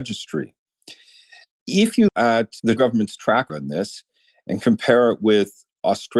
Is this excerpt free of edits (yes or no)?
no